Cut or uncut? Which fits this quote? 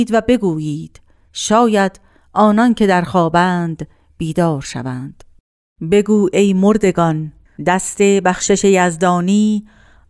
uncut